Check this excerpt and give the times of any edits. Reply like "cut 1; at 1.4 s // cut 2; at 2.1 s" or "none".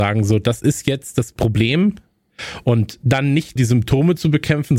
cut 1; at 3.6 s